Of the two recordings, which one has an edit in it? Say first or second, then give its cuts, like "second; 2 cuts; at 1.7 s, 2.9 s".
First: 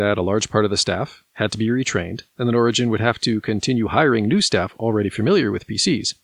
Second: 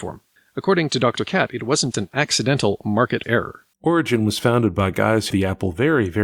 second; 4 cuts; at 1.9 s, 3.2 s, 3.7 s, 5.3 s